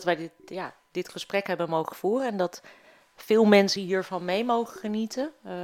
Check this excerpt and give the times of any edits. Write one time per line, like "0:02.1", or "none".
none